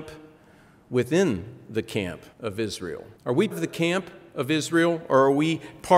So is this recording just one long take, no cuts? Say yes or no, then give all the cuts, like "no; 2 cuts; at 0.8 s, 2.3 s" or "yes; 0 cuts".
no; 3 cuts; at 2.3 s, 3.1 s, 3.5 s